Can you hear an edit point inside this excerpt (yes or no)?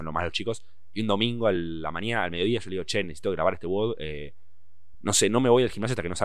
no